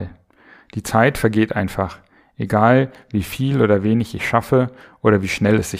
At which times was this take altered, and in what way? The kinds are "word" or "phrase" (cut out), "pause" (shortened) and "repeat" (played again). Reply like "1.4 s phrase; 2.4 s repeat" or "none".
none